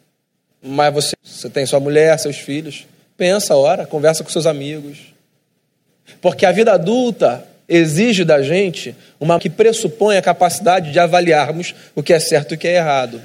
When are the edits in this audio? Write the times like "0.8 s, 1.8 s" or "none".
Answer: 1.1 s, 9.4 s